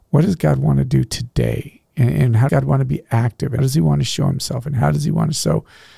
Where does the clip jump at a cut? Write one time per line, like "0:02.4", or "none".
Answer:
0:02.5
0:03.6